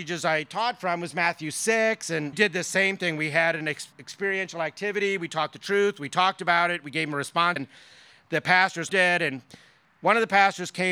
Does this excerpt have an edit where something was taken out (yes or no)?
yes